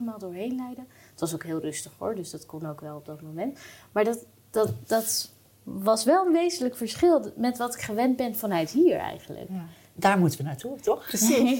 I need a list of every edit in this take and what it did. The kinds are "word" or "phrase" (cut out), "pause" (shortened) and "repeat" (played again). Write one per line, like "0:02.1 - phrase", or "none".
none

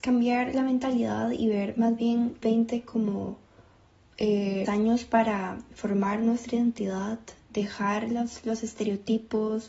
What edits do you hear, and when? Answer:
0:02.4 - word
0:04.7 - word
0:07.4 - word

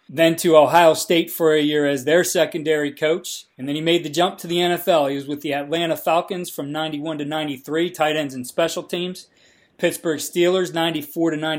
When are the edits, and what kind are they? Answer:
0:03.5 - pause

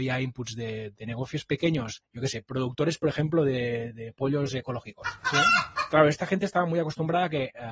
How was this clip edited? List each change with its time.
none

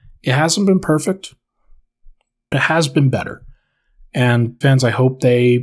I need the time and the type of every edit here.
0:02.5 - word
0:04.6 - word

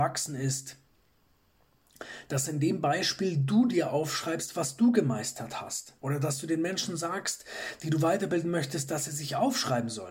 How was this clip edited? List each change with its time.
0:06.0 - pause

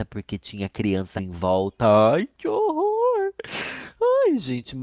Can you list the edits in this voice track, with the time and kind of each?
0:01.2 - word

